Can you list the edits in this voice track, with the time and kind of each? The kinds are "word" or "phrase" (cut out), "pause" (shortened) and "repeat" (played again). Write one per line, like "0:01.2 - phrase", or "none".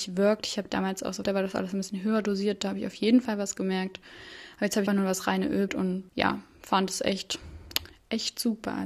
0:01.2 - phrase
0:04.9 - word
0:05.7 - word
0:06.1 - pause